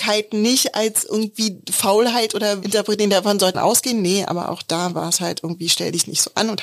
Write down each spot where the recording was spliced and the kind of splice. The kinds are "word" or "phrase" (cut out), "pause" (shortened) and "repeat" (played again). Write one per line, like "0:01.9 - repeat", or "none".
0:02.6 - word
0:03.5 - word